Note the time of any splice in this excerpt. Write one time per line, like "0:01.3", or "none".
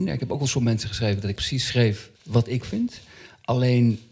0:01.4
0:02.2
0:02.6